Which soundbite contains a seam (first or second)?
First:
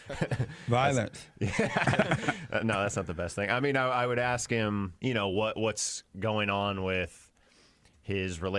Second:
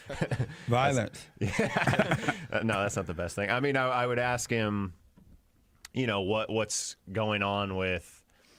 first